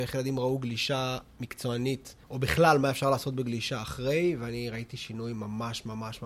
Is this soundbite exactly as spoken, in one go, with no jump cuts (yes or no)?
no